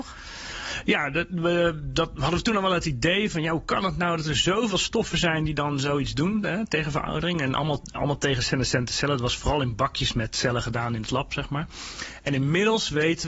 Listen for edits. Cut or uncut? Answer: uncut